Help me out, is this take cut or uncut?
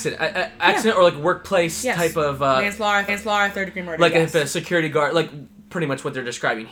cut